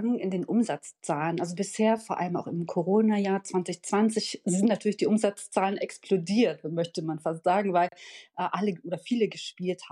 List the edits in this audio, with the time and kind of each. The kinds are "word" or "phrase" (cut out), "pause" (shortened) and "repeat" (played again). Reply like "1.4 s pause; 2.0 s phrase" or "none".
none

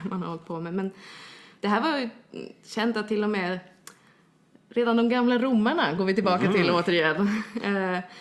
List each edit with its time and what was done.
none

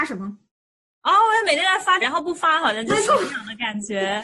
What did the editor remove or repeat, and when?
2.0 s word

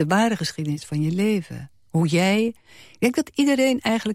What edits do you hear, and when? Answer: none

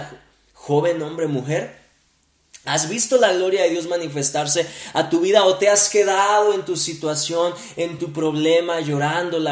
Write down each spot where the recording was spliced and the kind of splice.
none

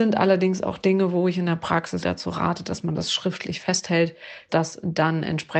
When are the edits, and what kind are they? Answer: 2.0 s word

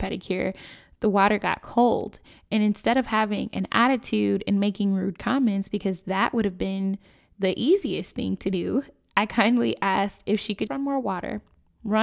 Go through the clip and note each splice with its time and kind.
10.7 s word

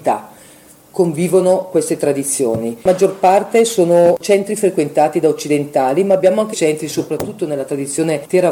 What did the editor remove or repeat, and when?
2.8 s pause; 6.5 s word

